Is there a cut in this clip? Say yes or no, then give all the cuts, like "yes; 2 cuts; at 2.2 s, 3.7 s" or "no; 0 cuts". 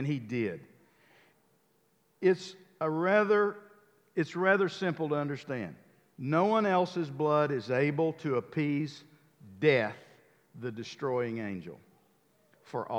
no; 0 cuts